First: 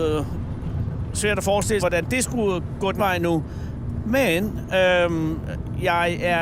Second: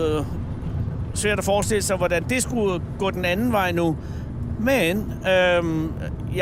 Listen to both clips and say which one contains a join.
first; 2 cuts; at 1.8 s, 3.0 s

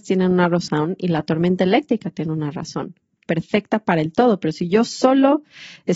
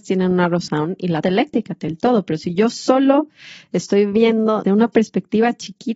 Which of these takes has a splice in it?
second; 3 cuts; at 1.2 s, 1.9 s, 4.6 s

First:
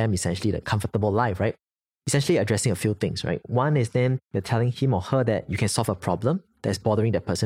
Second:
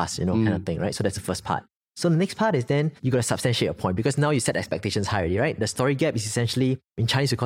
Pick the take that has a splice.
second; 2 cuts; at 1.8 s, 3.0 s

